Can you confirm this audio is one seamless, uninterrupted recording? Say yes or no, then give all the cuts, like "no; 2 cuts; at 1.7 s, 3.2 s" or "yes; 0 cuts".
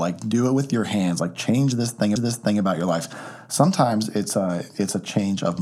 no; 1 cut; at 2.2 s